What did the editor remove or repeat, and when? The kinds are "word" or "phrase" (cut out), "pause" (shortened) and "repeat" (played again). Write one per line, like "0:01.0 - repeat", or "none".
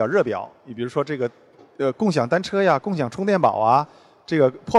none